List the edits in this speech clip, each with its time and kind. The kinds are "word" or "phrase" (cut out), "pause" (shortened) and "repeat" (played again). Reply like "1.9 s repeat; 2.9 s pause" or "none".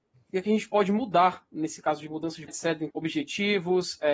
2.5 s word; 2.9 s phrase